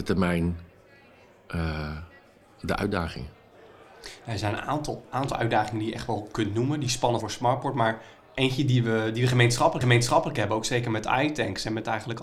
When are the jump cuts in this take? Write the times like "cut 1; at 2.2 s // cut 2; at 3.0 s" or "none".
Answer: cut 1; at 7.2 s // cut 2; at 9.8 s